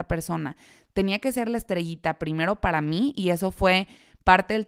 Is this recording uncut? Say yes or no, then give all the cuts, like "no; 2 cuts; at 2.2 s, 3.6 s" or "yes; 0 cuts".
yes; 0 cuts